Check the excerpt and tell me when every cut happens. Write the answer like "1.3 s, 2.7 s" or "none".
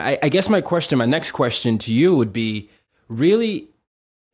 none